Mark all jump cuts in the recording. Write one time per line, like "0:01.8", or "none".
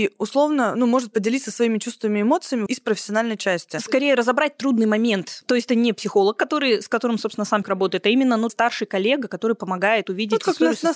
0:02.7
0:05.7
0:07.6
0:08.5